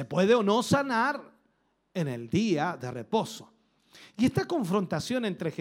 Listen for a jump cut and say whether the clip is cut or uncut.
uncut